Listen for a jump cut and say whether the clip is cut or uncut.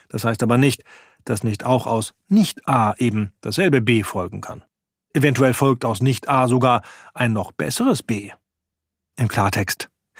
uncut